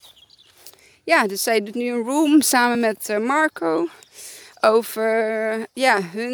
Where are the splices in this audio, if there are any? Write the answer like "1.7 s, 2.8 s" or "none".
none